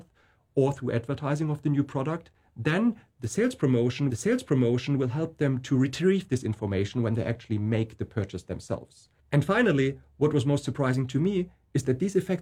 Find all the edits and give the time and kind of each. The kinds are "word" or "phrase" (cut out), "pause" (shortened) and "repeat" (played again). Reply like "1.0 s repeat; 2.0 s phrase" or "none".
4.1 s repeat